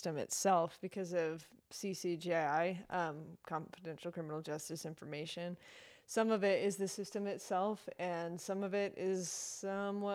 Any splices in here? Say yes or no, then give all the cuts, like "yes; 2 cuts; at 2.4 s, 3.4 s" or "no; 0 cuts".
no; 0 cuts